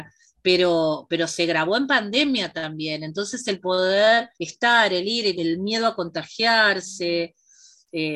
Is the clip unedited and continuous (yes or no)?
no